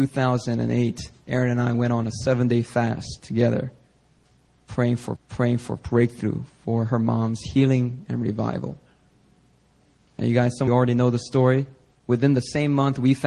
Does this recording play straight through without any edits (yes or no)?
no